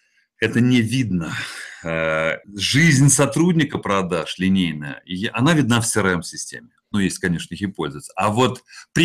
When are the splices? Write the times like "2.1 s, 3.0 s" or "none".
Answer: 2.4 s